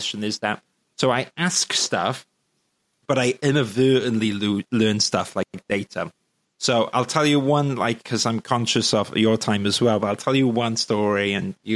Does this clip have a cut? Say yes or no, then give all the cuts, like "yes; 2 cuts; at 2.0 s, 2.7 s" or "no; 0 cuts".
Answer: no; 0 cuts